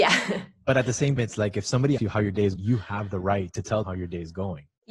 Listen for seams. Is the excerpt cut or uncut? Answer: cut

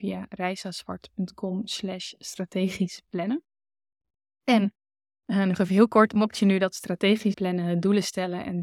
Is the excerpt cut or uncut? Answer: cut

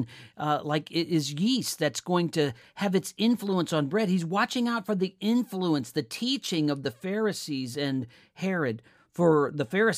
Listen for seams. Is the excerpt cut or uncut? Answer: uncut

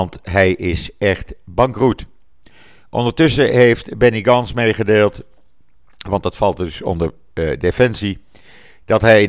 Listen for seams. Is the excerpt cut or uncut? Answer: uncut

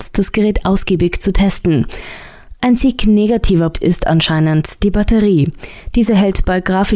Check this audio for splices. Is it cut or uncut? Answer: cut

